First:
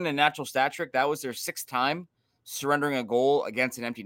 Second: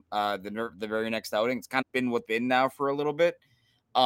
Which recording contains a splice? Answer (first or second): second